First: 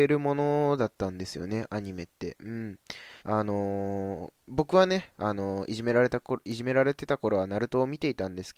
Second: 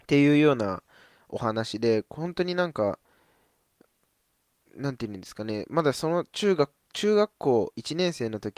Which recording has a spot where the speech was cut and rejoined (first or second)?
first